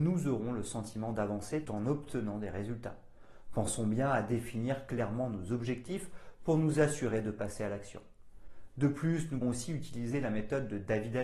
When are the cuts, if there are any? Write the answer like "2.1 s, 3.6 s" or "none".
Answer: 1.6 s, 9.4 s